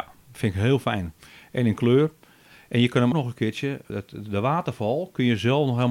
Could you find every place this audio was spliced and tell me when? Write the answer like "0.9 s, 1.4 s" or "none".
3.1 s, 3.9 s

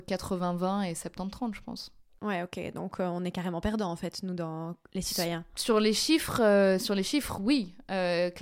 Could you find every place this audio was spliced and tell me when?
none

